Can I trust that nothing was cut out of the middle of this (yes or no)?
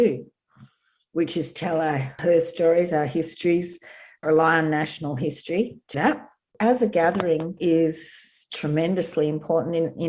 no